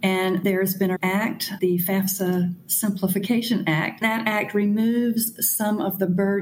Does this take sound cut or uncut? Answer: cut